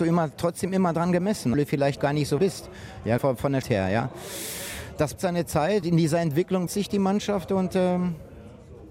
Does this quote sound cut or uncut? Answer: cut